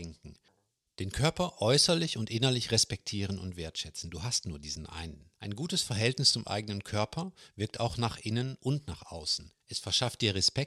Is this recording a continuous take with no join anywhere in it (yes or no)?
no